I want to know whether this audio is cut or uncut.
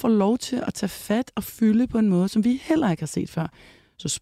uncut